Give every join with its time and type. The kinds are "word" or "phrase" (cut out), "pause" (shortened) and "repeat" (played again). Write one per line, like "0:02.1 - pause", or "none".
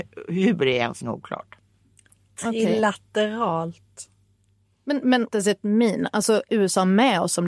0:01.0 - word
0:05.3 - word
0:06.5 - word